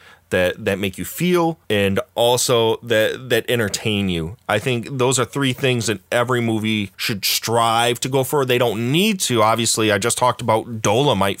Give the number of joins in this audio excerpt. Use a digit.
2